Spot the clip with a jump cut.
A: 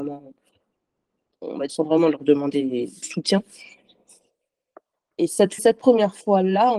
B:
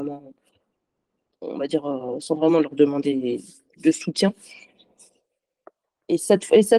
A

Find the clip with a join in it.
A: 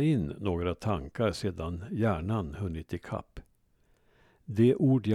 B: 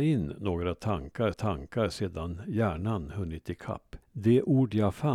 B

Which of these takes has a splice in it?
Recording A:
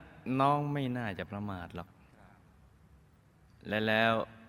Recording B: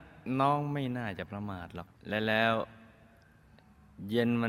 B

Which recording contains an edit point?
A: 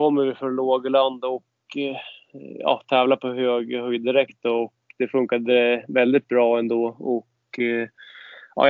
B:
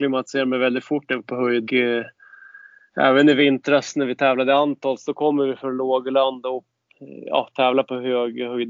B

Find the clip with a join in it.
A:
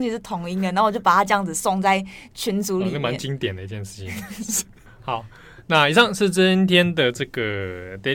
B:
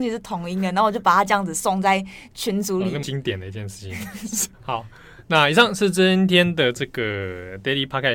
B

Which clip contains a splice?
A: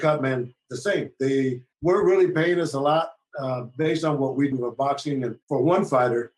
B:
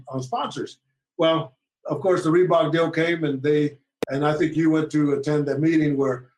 A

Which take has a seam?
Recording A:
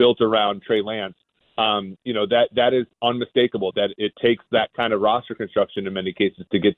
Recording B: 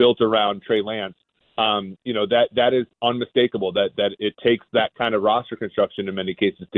A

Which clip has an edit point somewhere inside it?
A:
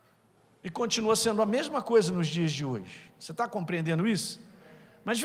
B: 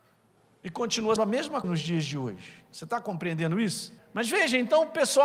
B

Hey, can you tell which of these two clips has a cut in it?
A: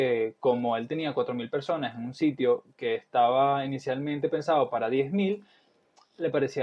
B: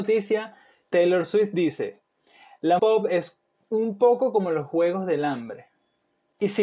B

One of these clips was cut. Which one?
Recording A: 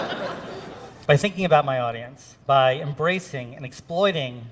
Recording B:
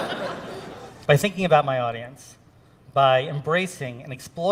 A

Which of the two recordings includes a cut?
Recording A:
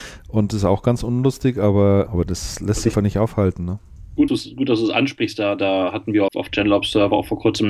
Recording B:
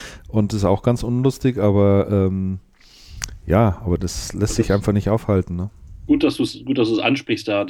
A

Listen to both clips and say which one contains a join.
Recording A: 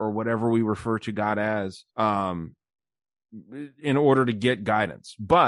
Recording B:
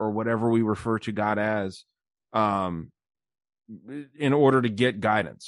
A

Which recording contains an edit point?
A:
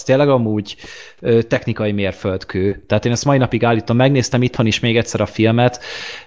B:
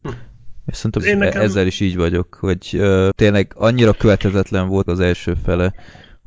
B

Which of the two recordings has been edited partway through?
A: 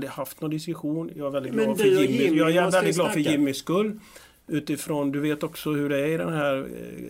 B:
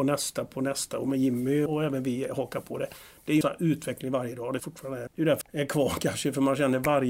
B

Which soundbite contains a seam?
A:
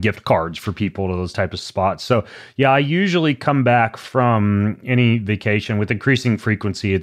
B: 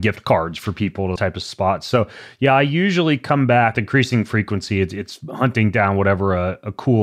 B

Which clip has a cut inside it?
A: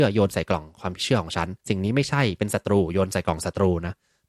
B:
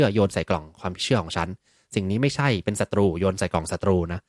A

